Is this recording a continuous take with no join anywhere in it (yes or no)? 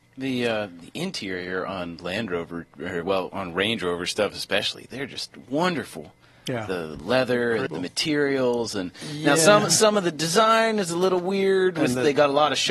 no